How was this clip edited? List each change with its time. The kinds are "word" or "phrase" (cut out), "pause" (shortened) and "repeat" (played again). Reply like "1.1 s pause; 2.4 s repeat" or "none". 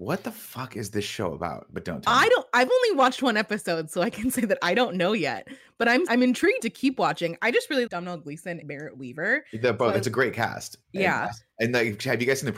6.1 s word; 6.6 s word; 7.9 s word; 8.6 s word

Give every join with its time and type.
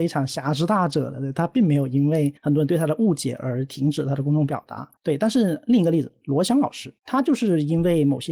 2.4 s pause; 5.0 s pause; 7.0 s pause

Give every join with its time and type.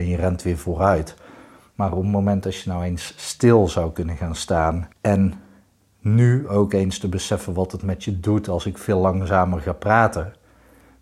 4.9 s pause

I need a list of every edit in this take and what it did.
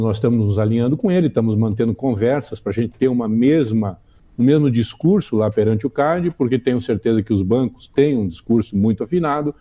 none

